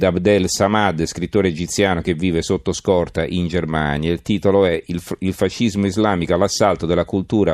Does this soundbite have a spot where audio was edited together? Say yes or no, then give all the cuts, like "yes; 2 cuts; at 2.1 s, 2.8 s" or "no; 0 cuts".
no; 0 cuts